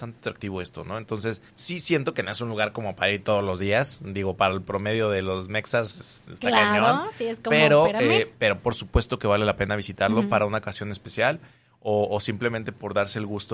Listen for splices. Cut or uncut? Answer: cut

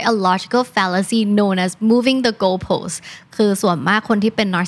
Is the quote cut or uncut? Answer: uncut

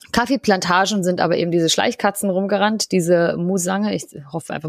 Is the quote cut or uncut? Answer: uncut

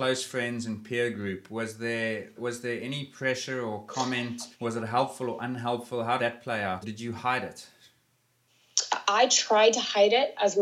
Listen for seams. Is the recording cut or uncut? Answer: cut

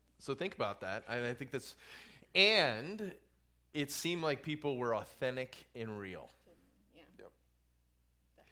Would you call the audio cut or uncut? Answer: uncut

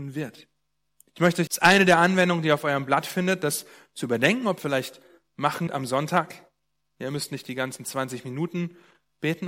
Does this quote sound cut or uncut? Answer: cut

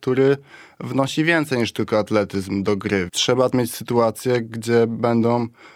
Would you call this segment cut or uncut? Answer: cut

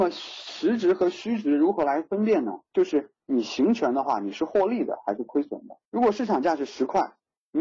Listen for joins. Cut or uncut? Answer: cut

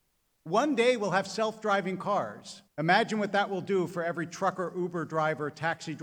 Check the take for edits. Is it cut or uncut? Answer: cut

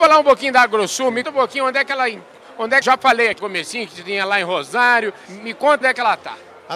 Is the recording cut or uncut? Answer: cut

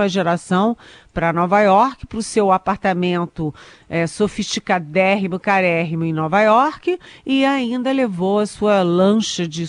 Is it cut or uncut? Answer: uncut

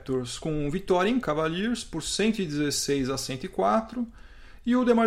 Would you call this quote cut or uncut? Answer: cut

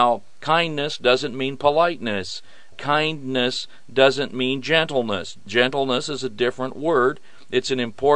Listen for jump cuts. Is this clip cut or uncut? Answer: uncut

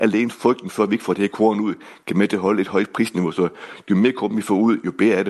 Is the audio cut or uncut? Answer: uncut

